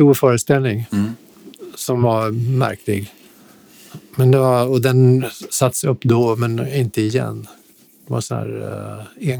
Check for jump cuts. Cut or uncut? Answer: uncut